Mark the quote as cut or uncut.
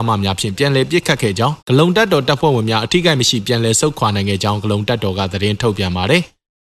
cut